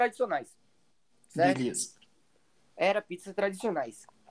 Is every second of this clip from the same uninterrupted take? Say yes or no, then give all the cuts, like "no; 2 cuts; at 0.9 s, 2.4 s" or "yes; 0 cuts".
yes; 0 cuts